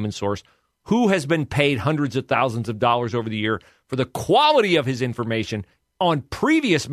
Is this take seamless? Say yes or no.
yes